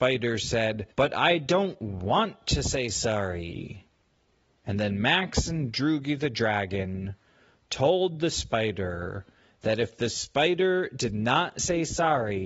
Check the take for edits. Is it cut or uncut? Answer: cut